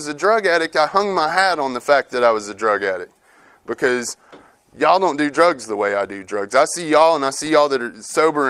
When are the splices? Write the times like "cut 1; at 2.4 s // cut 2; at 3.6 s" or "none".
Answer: none